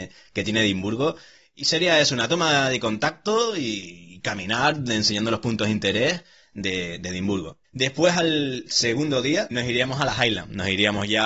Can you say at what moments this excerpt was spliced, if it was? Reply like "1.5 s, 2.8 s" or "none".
7.6 s, 9.5 s